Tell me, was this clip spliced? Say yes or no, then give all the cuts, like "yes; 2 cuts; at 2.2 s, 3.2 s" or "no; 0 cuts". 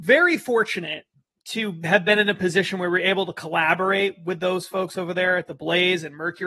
no; 0 cuts